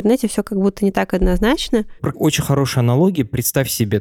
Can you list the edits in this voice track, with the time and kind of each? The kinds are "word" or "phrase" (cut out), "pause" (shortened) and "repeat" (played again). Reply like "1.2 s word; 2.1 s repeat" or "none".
2.1 s word